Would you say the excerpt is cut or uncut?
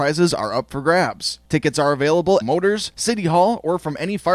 cut